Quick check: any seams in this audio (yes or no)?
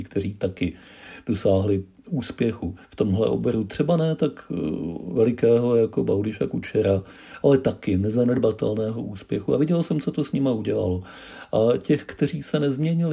yes